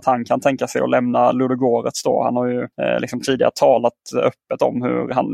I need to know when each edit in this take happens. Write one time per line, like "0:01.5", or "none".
0:02.7